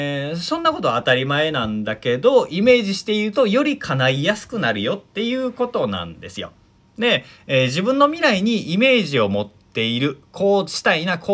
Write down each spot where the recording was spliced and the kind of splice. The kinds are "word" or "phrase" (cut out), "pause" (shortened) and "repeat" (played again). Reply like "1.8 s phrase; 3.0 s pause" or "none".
none

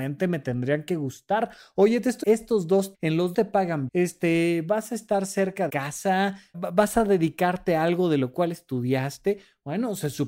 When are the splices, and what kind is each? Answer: 2.2 s word; 2.9 s word; 3.3 s word; 3.9 s word; 5.7 s word; 6.5 s word

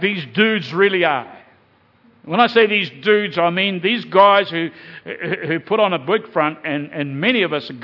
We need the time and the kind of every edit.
2.0 s pause

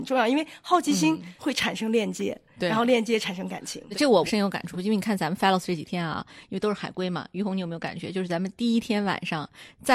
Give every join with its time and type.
none

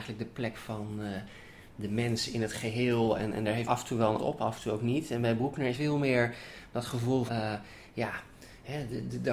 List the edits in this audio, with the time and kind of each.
3.7 s word; 4.2 s word; 5.7 s word; 7.3 s word

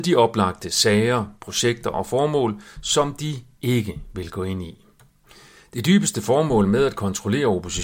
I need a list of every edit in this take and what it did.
5.1 s pause

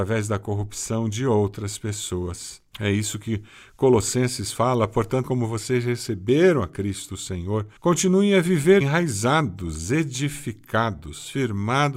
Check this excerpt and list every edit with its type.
5.2 s word; 7.8 s pause; 8.8 s word

